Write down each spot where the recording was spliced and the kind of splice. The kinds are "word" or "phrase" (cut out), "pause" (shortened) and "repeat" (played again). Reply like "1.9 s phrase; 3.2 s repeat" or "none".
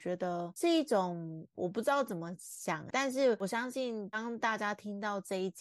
2.9 s word